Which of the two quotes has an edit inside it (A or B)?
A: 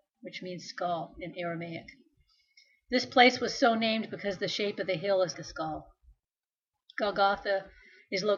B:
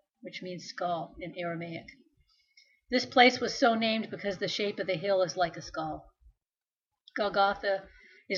A